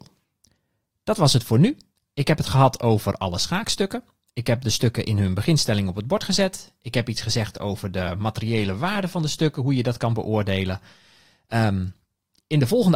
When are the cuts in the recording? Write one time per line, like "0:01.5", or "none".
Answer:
none

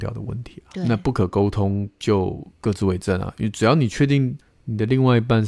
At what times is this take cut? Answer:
0:04.4

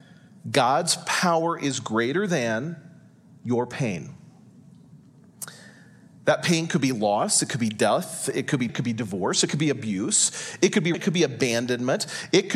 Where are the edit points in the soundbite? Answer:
0:08.7
0:10.9

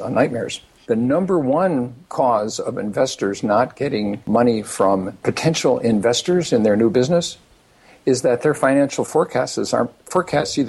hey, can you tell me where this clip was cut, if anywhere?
none

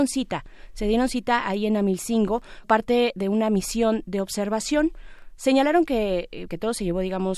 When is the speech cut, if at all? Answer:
0:02.6
0:06.5

